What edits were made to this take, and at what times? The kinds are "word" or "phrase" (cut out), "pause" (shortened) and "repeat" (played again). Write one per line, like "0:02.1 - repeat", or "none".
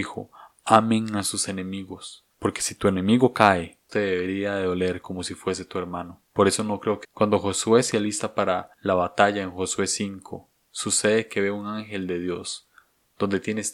0:02.3 - pause
0:03.9 - phrase
0:06.2 - pause
0:07.0 - phrase
0:08.7 - pause